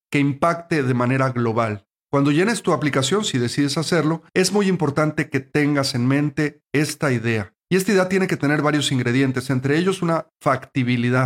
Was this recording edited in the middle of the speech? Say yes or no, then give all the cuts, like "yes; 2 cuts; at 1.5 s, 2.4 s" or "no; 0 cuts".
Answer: yes; 3 cuts; at 1.9 s, 4.3 s, 7.6 s